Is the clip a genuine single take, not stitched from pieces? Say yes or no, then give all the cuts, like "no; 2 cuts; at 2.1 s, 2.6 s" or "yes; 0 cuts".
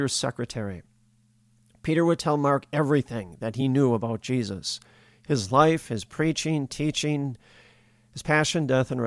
yes; 0 cuts